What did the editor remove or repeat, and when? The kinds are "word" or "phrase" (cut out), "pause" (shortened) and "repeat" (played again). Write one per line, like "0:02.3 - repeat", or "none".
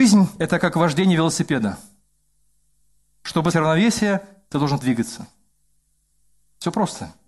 0:03.5 - word
0:04.8 - word

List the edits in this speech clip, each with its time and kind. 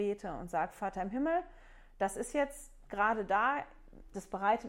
none

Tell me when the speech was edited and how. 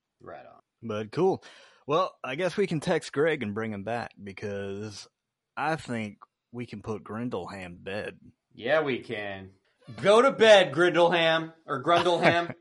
0:07.8 - word

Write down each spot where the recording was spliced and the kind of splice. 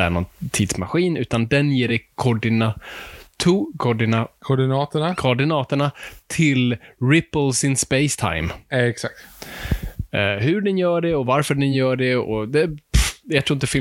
none

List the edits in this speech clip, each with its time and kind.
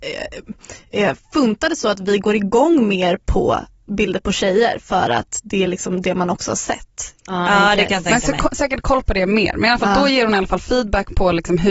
none

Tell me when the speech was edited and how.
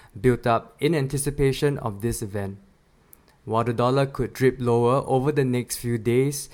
none

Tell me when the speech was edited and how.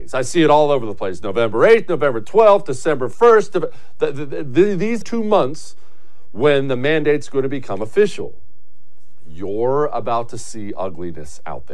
0:05.0 - phrase

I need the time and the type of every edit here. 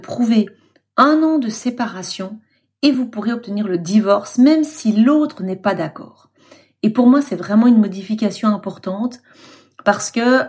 none

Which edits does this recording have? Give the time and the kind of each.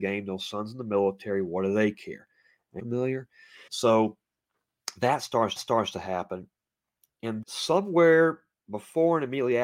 0:02.8 - phrase
0:03.7 - pause
0:05.6 - repeat
0:07.4 - word

